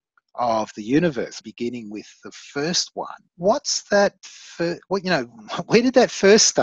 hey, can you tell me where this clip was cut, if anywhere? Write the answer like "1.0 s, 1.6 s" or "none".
1.4 s, 3.3 s